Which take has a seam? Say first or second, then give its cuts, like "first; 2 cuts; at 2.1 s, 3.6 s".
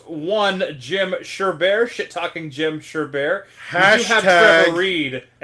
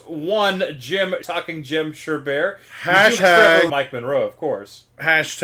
second; 3 cuts; at 1.2 s, 3.2 s, 3.7 s